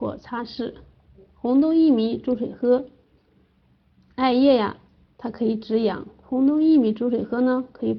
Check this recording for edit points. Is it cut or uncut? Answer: uncut